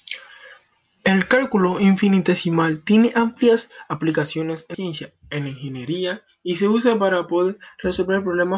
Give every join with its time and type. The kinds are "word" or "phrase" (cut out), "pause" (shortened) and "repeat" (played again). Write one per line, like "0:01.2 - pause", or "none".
0:04.7 - word